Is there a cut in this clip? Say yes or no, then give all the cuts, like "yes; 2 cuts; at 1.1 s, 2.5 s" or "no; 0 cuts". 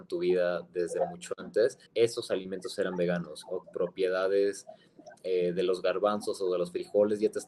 yes; 2 cuts; at 1.9 s, 3.6 s